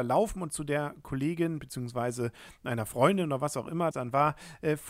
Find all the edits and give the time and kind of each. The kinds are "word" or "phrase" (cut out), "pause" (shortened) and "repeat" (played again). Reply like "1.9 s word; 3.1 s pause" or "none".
3.9 s word